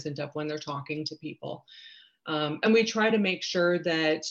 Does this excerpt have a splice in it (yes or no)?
no